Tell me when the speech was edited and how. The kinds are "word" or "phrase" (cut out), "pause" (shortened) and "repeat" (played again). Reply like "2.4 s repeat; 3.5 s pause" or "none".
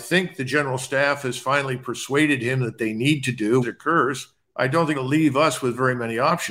3.6 s word; 4.4 s pause; 4.9 s phrase